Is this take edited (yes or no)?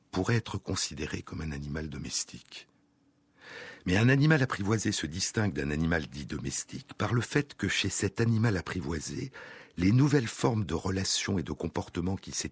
no